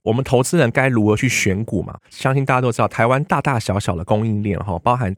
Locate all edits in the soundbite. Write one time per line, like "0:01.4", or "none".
0:02.1